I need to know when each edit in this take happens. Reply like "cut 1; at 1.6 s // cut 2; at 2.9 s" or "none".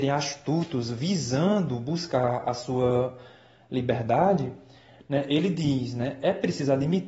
none